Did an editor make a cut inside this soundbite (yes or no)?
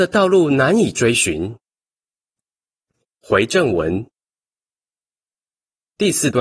no